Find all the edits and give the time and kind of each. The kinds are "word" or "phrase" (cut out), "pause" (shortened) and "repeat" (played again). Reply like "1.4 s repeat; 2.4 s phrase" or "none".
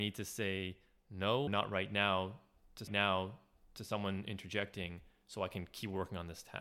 1.5 s word; 2.9 s repeat